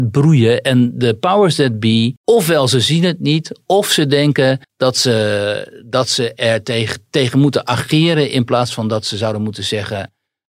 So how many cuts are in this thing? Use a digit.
2